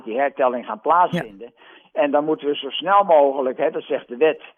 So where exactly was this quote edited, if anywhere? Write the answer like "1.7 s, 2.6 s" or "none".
none